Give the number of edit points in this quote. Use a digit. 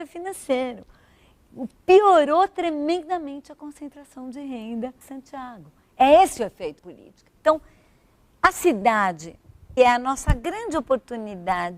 3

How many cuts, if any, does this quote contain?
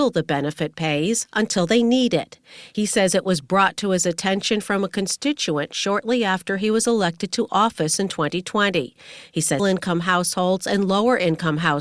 1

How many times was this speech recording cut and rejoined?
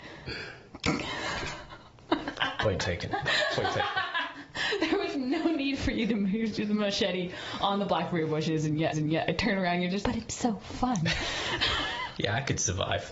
2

